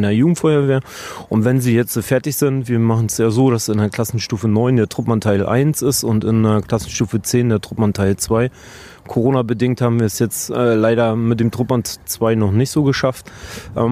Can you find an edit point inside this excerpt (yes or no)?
yes